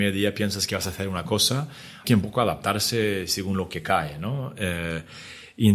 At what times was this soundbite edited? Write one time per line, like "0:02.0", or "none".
0:02.0